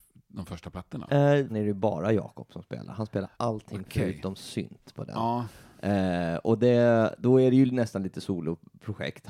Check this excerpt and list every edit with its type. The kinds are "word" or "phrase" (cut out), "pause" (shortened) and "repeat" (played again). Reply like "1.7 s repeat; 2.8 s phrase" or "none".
1.5 s phrase

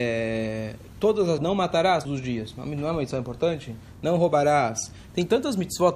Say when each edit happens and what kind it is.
1.4 s word; 2.0 s word

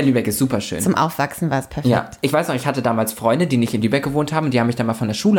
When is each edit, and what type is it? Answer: none

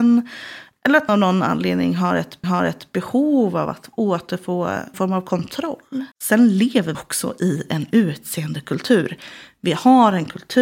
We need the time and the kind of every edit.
1.1 s word; 2.4 s repeat; 4.9 s word; 6.1 s pause; 6.9 s word

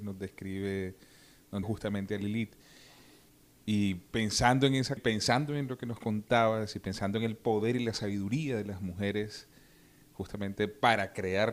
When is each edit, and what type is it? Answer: 1.6 s word; 5.0 s word

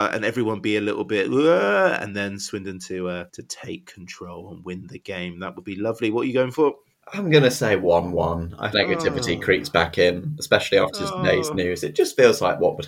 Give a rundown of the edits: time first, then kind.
3.3 s pause; 8.7 s phrase

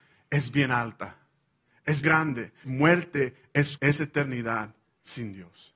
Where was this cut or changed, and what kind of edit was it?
2.0 s word; 2.6 s word; 3.8 s word

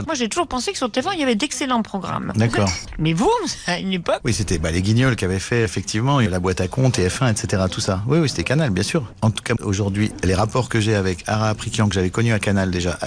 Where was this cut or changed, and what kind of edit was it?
5.7 s word

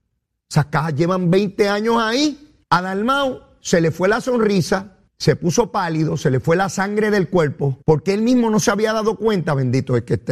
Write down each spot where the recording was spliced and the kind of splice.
2.6 s pause; 5.1 s pause; 7.8 s pause

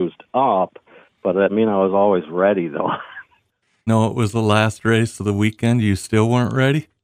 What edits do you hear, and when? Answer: 1.5 s word; 3.9 s word

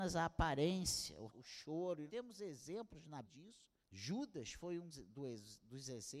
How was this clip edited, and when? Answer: 1.3 s word; 2.1 s word; 3.2 s word; 3.8 s pause; 4.9 s word

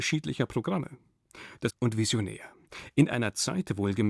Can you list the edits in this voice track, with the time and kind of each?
1.7 s phrase

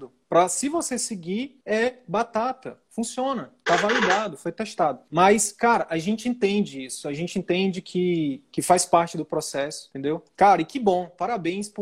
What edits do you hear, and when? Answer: none

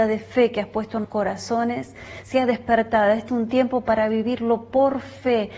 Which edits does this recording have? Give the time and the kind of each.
1.0 s word; 3.3 s word

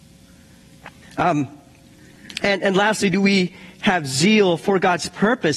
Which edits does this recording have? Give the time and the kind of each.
1.0 s pause

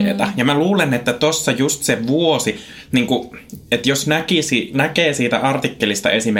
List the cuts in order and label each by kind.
none

